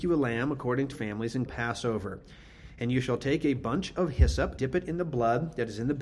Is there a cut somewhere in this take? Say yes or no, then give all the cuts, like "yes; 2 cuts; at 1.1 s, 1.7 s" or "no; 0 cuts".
yes; 3 cuts; at 0.9 s, 1.5 s, 4.6 s